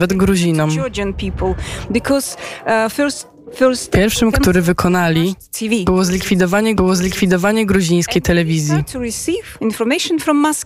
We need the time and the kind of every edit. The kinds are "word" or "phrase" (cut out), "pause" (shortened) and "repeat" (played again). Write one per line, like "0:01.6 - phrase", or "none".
0:04.3 - word
0:06.8 - repeat